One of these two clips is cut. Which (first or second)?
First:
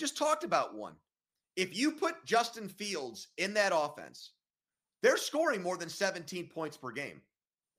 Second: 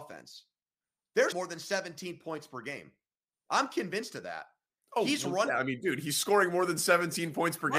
second